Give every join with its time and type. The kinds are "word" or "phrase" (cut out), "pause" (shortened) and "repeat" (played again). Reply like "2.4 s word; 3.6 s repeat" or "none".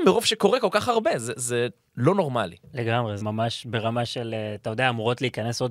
3.2 s word